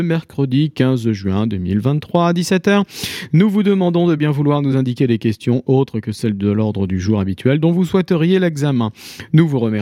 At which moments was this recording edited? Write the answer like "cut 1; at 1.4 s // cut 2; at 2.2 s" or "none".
none